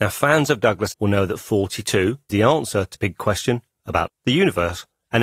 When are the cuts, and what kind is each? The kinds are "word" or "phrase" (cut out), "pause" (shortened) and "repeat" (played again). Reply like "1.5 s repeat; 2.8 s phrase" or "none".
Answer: 0.9 s word; 2.3 s word; 2.9 s word; 4.1 s word